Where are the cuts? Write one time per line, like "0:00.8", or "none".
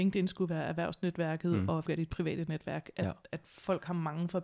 0:01.9